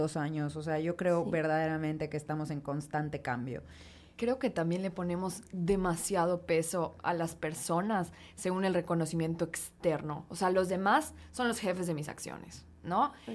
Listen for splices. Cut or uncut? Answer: uncut